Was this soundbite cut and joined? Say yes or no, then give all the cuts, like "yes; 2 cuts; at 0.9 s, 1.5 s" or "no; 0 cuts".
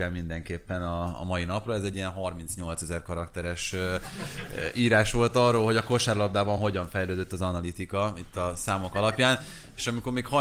no; 0 cuts